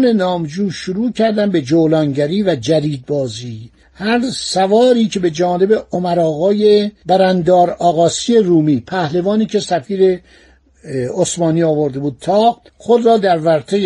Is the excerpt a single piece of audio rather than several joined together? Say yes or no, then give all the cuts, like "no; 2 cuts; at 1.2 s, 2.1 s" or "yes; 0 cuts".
no; 2 cuts; at 3.8 s, 12.7 s